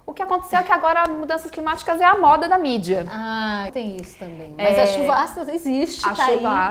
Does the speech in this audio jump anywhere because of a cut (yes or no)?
yes